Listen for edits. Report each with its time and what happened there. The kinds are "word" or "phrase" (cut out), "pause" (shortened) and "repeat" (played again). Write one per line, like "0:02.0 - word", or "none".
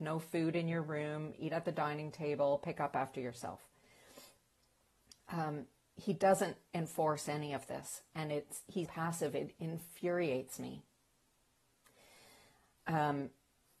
0:05.8 - pause
0:08.9 - word

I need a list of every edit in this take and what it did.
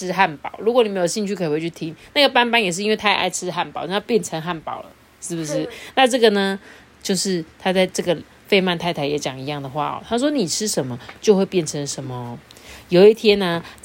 none

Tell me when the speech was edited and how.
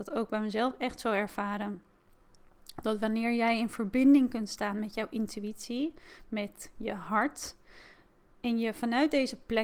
none

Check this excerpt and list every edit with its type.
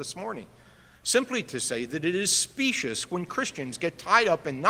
none

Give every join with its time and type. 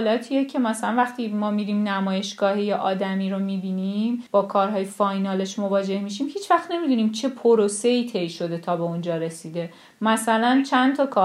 0:04.3 - pause

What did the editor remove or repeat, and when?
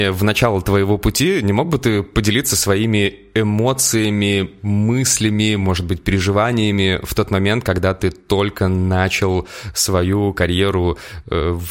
none

